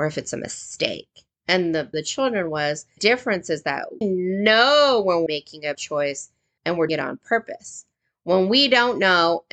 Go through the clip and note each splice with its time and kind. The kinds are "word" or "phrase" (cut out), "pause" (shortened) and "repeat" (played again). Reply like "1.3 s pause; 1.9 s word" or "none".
1.3 s pause; 1.9 s phrase; 3.0 s word; 4.0 s word; 5.3 s word; 5.7 s word; 6.6 s word; 6.9 s word